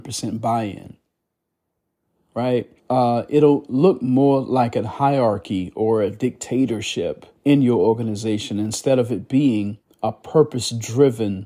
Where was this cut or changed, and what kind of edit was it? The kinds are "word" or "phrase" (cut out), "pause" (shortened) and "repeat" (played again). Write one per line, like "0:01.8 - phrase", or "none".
0:02.8 - pause
0:07.4 - pause
0:09.8 - pause